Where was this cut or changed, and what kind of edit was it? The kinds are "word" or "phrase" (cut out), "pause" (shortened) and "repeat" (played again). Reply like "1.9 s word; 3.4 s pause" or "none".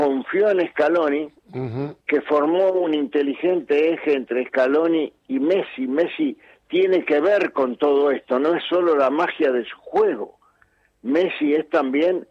2.0 s pause

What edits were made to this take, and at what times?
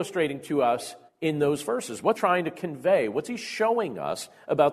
1.1 s pause; 2.1 s word

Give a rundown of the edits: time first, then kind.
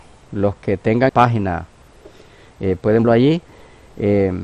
1.1 s phrase; 3.0 s word

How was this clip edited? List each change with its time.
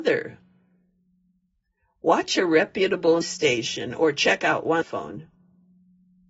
3.2 s word; 4.8 s phrase

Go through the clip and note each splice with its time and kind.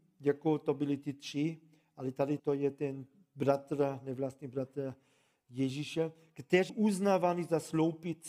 2.4 s word; 6.7 s word

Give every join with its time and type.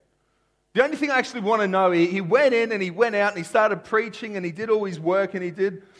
none

